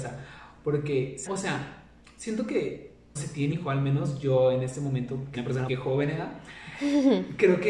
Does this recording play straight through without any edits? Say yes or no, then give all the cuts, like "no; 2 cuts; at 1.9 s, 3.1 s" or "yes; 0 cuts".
no; 5 cuts; at 1.3 s, 3.2 s, 3.5 s, 5.3 s, 5.7 s